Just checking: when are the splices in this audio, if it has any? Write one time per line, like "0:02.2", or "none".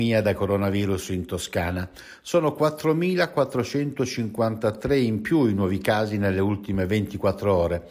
none